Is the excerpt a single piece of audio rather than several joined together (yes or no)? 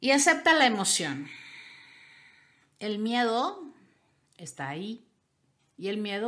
yes